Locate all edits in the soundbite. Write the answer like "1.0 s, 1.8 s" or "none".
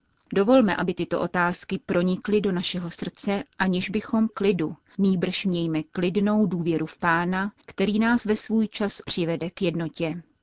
4.3 s, 7.6 s, 9.0 s